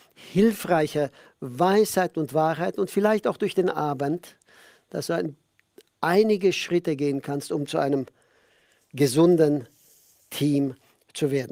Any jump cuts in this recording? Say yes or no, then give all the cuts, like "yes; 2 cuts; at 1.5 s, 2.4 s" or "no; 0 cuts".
no; 0 cuts